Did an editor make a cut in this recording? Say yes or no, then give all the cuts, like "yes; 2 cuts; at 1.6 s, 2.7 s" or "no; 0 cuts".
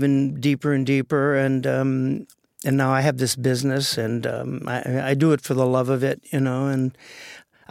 no; 0 cuts